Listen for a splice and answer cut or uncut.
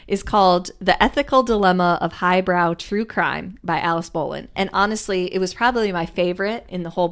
uncut